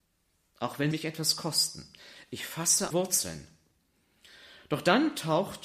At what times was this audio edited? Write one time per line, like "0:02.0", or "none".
0:00.9
0:02.9